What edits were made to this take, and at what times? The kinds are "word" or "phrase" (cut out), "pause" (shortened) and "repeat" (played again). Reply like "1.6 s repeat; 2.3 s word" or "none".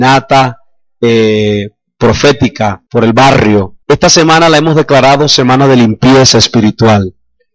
2.9 s pause; 3.8 s pause